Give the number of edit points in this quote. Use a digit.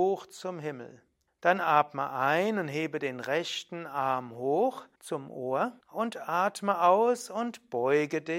3